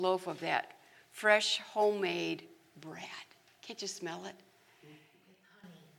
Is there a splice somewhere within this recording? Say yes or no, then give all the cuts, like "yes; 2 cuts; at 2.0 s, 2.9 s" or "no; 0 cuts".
no; 0 cuts